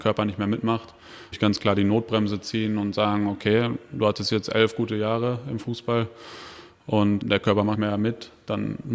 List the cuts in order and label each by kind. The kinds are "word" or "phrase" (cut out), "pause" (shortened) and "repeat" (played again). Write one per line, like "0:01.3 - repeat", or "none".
0:01.3 - word
0:07.2 - word
0:07.7 - word